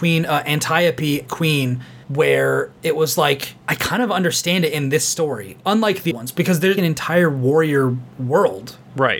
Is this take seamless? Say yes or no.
no